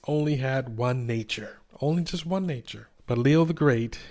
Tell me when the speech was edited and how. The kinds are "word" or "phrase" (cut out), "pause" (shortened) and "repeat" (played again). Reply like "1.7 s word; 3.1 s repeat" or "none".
1.7 s pause